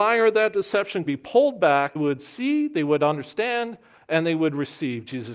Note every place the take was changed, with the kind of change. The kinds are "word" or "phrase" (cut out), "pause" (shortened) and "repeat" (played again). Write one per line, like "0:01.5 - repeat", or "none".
0:01.1 - word
0:02.0 - word